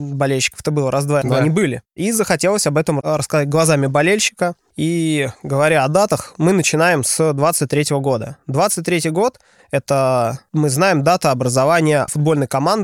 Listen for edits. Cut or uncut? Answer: cut